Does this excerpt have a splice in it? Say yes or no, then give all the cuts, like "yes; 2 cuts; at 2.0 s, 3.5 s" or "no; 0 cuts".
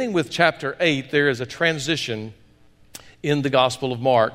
no; 0 cuts